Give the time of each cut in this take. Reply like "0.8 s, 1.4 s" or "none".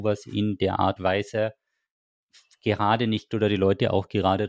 1.0 s, 3.3 s